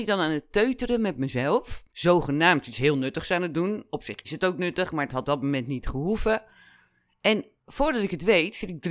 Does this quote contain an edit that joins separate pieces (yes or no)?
yes